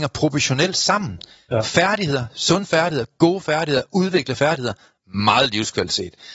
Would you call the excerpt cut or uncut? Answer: uncut